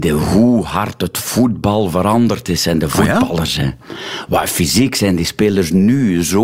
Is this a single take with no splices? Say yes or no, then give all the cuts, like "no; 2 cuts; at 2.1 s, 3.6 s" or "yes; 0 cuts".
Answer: yes; 0 cuts